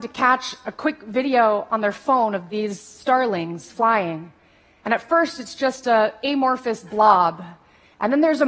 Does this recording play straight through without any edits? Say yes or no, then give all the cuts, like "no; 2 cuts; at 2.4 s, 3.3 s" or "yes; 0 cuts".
yes; 0 cuts